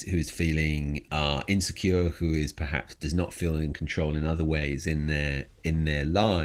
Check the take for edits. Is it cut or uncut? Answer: uncut